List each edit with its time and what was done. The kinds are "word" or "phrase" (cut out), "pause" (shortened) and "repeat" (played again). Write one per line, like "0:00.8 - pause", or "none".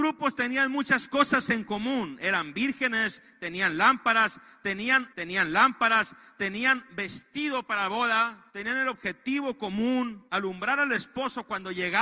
0:05.1 - repeat
0:08.5 - pause
0:10.3 - pause